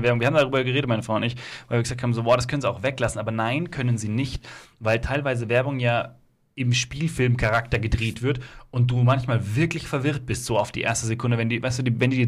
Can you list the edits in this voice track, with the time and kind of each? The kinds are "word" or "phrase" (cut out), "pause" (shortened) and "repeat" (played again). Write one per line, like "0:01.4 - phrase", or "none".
none